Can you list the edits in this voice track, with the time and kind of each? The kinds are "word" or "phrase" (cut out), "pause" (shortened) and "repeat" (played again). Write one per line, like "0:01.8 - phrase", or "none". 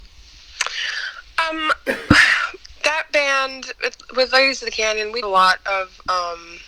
0:05.2 - word